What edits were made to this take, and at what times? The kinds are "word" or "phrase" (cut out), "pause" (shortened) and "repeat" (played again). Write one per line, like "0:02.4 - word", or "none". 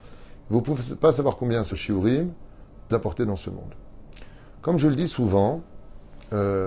0:01.7 - word
0:02.9 - word